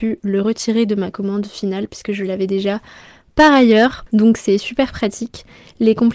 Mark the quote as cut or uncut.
uncut